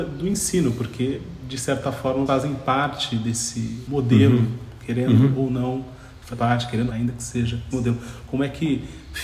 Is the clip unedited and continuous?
no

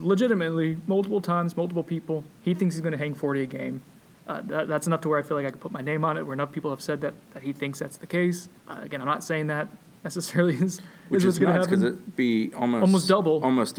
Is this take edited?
yes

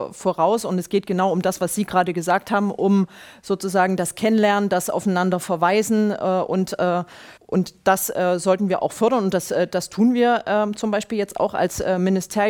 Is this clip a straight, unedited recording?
no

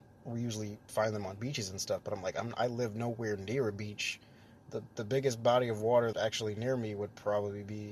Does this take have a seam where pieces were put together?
yes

